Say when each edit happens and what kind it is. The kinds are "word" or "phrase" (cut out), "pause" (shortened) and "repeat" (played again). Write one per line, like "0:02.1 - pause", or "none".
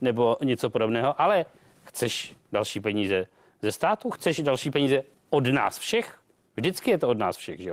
none